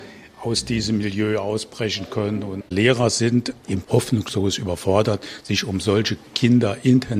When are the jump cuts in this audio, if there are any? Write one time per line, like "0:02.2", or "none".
0:02.6
0:03.8